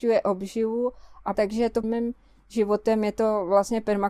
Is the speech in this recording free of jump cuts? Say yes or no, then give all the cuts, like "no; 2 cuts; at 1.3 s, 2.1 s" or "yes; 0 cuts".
no; 2 cuts; at 1.3 s, 1.8 s